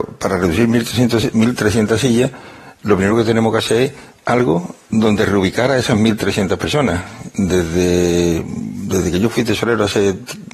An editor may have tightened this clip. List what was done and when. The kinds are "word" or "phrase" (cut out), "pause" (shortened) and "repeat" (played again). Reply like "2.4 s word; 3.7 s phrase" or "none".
none